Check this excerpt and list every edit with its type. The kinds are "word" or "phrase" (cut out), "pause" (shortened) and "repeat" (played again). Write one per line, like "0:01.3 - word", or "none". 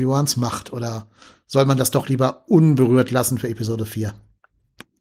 none